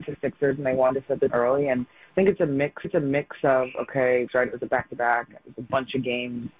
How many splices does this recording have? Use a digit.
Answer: 3